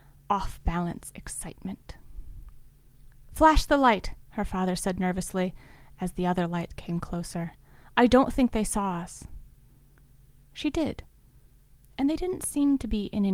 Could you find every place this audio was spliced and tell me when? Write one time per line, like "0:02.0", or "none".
none